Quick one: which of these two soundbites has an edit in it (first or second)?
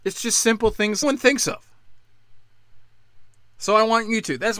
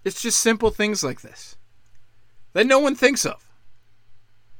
first